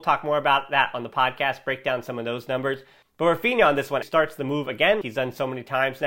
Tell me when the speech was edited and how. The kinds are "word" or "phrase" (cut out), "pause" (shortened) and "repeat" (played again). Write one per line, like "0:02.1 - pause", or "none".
0:04.0 - word
0:05.0 - word